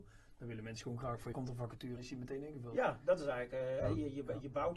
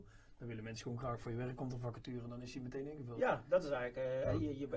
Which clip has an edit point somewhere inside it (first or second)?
first